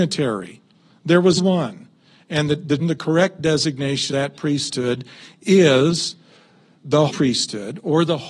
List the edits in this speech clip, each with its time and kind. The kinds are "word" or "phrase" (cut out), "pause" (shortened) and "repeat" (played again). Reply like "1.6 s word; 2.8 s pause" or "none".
1.4 s word; 2.8 s word; 4.1 s word; 7.1 s word